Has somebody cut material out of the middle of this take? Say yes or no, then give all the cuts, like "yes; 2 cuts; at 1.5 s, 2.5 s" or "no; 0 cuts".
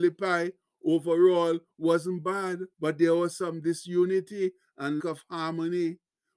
yes; 2 cuts; at 2.7 s, 5.0 s